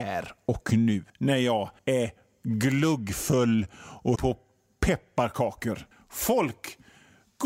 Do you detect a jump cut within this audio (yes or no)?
yes